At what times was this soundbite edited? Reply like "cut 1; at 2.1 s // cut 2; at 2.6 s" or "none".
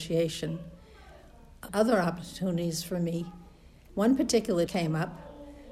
cut 1; at 1.7 s // cut 2; at 4.7 s